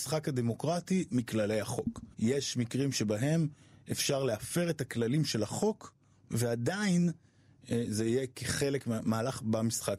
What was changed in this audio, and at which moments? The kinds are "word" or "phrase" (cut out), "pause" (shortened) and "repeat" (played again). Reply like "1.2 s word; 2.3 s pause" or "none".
1.1 s word; 2.1 s pause